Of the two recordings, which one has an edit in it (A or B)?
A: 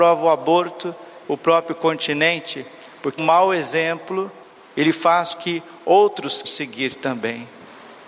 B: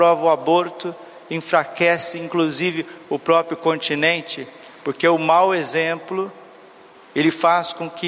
A